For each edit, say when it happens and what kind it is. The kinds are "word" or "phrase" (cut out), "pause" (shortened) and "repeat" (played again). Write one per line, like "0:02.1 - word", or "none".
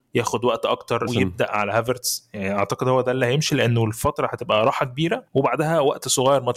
0:01.1 - word
0:05.3 - pause